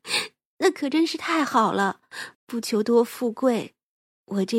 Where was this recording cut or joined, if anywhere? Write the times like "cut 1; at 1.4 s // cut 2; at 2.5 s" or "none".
cut 1; at 2.3 s